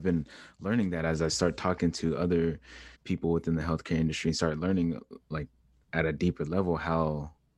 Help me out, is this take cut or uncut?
cut